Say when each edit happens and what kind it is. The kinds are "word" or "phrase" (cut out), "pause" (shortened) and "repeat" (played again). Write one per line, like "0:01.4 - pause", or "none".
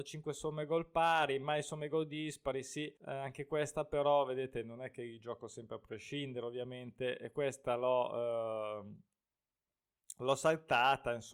0:03.0 - pause